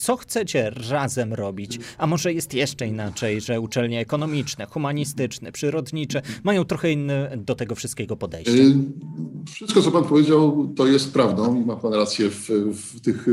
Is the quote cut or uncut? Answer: uncut